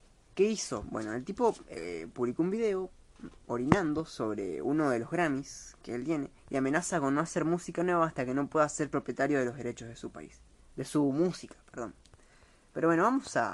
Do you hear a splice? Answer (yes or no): yes